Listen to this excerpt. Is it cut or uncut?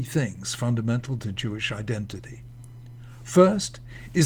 uncut